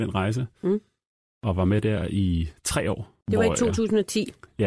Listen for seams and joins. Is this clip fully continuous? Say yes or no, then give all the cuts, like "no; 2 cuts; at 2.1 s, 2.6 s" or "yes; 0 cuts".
no; 1 cut; at 3.2 s